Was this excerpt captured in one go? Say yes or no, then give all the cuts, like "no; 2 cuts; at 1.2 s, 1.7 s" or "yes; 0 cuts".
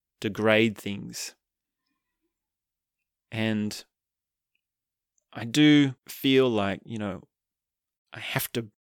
no; 1 cut; at 6.0 s